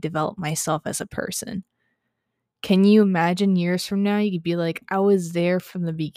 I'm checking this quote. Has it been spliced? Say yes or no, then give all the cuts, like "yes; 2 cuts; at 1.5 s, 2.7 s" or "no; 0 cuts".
no; 0 cuts